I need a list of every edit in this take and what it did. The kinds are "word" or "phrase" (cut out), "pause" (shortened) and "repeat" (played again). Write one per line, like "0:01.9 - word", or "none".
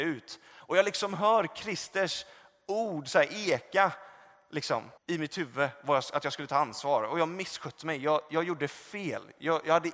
0:05.0 - pause